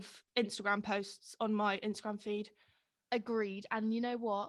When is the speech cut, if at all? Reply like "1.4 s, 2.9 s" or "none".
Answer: none